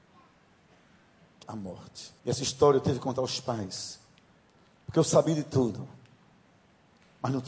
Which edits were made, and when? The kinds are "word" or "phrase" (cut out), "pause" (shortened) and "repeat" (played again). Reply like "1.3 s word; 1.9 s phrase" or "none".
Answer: 1.4 s word; 2.2 s pause